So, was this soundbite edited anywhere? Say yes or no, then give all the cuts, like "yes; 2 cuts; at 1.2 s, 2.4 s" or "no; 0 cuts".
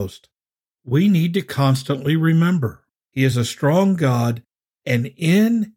no; 0 cuts